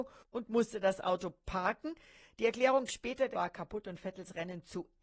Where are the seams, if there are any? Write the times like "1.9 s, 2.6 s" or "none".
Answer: 2.9 s, 3.3 s